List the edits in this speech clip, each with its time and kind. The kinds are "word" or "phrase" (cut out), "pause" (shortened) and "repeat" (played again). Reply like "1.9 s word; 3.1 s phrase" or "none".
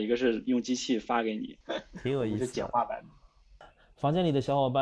none